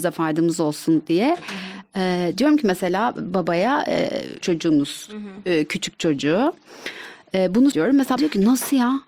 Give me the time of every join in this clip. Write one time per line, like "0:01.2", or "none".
0:04.4
0:07.7
0:08.2